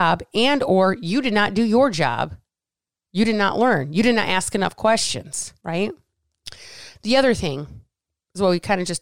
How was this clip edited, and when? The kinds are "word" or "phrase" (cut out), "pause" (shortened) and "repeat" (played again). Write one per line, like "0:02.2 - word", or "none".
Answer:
none

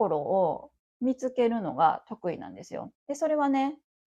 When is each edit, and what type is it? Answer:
0:03.0 - pause

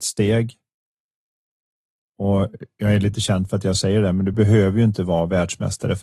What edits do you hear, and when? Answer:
none

